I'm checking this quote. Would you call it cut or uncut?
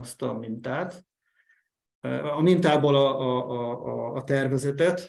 uncut